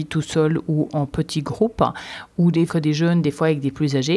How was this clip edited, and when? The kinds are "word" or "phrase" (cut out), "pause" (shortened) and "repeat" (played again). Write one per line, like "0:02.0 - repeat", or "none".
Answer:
0:02.7 - word

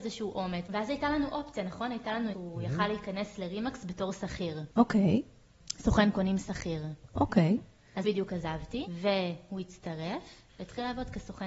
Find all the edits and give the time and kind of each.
0:02.3 - word
0:08.0 - word
0:10.5 - pause

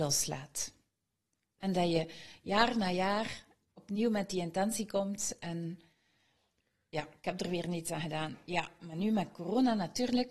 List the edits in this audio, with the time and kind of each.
none

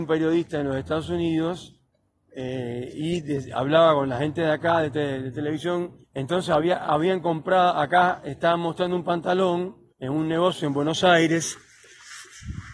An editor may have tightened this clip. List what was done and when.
0:01.9 - pause
0:06.0 - pause
0:09.9 - pause

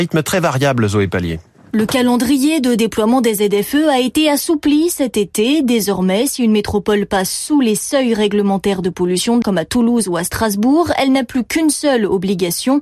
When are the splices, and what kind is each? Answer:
0:09.4 - word

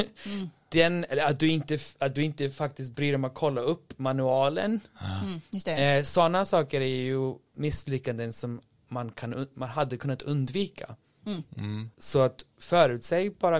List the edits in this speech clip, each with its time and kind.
0:07.5 - pause
0:11.9 - pause

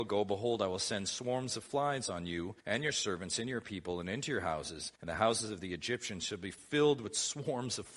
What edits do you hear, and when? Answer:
0:02.6 - pause
0:05.0 - pause

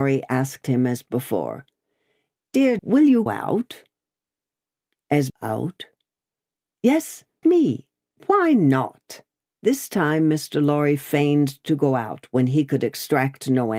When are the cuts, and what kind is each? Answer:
0:02.8 - word
0:03.3 - word
0:05.3 - phrase
0:07.4 - phrase
0:09.5 - pause

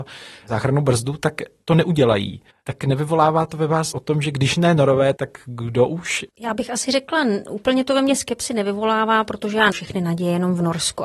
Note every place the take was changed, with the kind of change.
0:02.5 - pause
0:03.9 - word
0:05.2 - word
0:06.3 - pause
0:09.7 - word

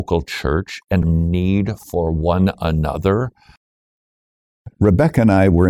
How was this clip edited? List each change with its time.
0:01.0 - word

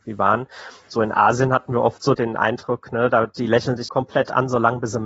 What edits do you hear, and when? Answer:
0:02.1 - word
0:03.9 - word

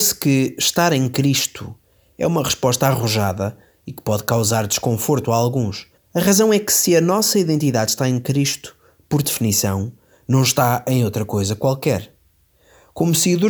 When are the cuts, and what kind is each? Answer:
0:06.0 - pause

